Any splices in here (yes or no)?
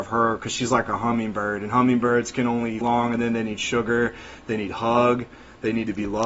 yes